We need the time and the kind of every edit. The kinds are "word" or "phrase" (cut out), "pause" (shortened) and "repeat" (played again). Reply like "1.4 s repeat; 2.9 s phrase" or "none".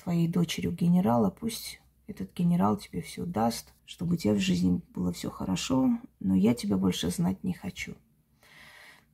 3.8 s pause